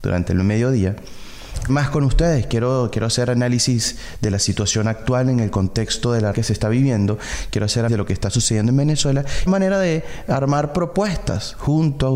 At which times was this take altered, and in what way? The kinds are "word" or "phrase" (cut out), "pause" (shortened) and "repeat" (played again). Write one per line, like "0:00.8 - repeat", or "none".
0:01.7 - word
0:06.3 - word
0:07.9 - word
0:09.5 - phrase